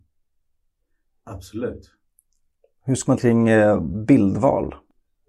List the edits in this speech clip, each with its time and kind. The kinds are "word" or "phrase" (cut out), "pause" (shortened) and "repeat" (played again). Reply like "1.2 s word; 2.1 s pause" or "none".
3.2 s word